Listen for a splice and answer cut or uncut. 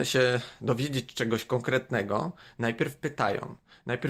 uncut